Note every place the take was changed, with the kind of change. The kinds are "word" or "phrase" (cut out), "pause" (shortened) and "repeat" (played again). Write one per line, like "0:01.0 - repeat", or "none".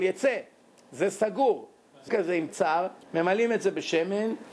0:02.1 - phrase
0:02.5 - word
0:03.0 - pause